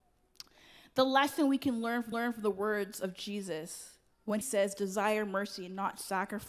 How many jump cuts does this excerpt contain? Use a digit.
2